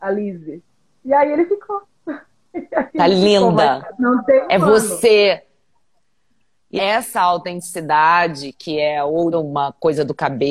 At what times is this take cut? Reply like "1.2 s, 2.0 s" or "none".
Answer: 6.8 s, 9.3 s